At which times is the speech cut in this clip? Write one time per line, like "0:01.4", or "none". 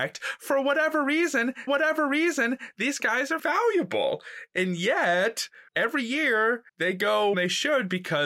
0:01.7
0:03.4
0:05.7
0:06.7
0:07.3